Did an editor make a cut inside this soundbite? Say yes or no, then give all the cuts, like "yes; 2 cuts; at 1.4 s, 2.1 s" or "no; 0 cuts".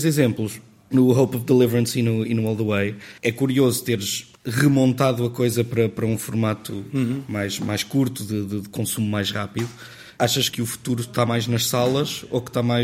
yes; 2 cuts; at 3.2 s, 4.4 s